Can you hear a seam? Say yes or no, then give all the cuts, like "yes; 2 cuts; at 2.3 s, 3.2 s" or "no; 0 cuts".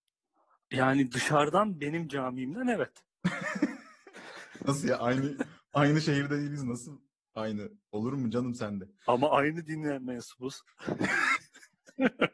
no; 0 cuts